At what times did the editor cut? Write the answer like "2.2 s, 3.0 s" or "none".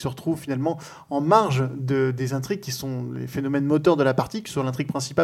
none